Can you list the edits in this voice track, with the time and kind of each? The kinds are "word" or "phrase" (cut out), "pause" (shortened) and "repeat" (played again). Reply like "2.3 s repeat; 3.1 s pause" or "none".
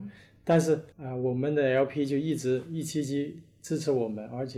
0.9 s pause

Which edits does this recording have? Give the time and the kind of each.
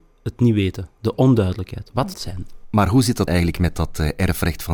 2.1 s phrase; 3.3 s word

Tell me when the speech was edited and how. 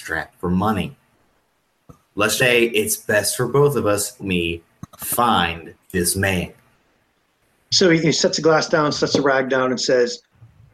2.4 s word; 4.2 s phrase; 5.8 s pause

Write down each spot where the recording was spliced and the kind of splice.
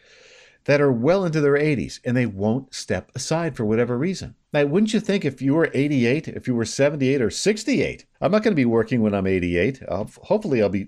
4.4 s pause; 8.1 s pause

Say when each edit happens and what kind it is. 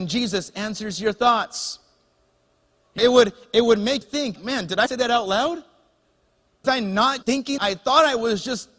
3.0 s word; 4.0 s word; 4.4 s word; 4.9 s word; 6.6 s word; 7.2 s word; 7.6 s word

